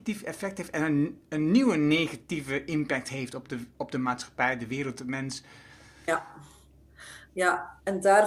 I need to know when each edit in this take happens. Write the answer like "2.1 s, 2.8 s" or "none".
none